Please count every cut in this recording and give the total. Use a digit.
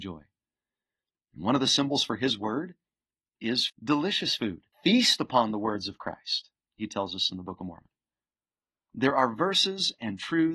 2